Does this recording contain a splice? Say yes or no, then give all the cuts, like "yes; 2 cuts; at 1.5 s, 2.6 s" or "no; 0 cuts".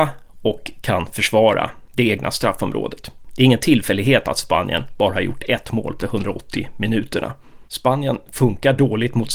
yes; 2 cuts; at 6.0 s, 7.7 s